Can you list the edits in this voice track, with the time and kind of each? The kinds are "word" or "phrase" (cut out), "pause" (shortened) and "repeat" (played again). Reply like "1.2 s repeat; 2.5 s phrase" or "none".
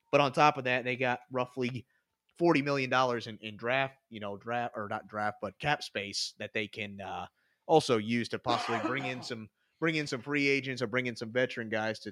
5.6 s word